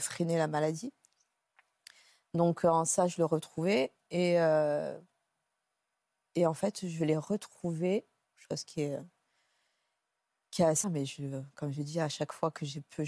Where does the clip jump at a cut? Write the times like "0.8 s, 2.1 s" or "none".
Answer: 8.2 s, 10.8 s